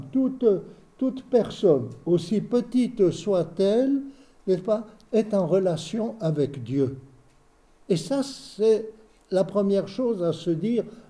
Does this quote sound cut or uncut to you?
uncut